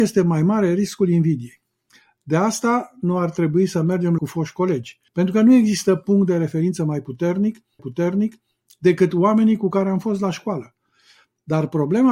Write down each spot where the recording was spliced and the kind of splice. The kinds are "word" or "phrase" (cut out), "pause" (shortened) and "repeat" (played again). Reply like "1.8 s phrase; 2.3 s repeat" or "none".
4.2 s phrase; 5.1 s pause; 7.8 s repeat